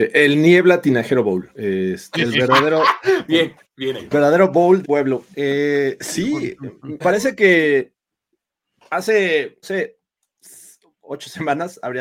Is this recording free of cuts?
no; 5 cuts; at 2.1 s, 4.1 s, 4.8 s, 7.0 s, 9.6 s

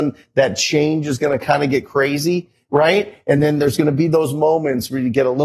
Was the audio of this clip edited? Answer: no; 0 cuts

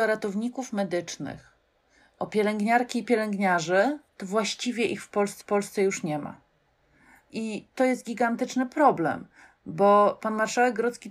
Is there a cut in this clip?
yes; 2 cuts; at 4.1 s, 5.4 s

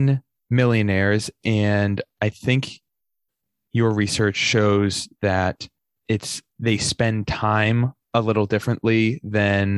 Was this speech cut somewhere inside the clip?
yes; 2 cuts; at 6.5 s, 8.0 s

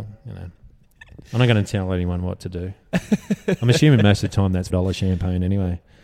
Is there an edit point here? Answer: yes; 1 cut; at 4.7 s

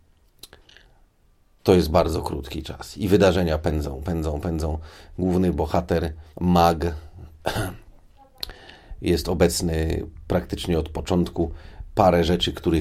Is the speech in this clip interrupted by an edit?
yes; 1 cut; at 6.3 s

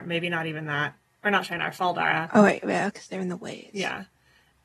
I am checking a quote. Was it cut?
no; 0 cuts

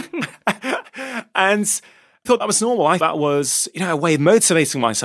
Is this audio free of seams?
no; 2 cuts; at 2.3 s, 3.0 s

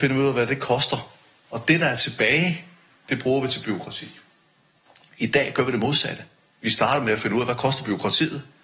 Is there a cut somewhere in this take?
no; 0 cuts

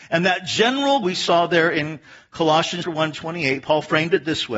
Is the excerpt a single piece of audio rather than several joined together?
no; 3 cuts; at 1.0 s, 2.8 s, 3.1 s

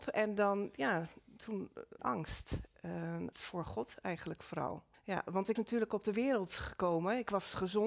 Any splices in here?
yes; 4 cuts; at 2.0 s, 3.3 s, 4.9 s, 5.6 s

